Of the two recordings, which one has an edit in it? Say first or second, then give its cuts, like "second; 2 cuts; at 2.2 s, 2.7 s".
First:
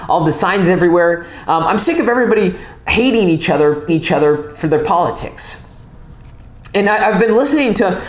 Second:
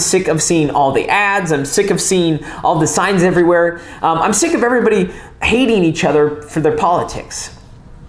first; 1 cut; at 3.9 s